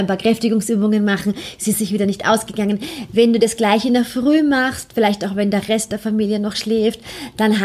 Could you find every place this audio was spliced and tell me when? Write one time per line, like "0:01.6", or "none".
none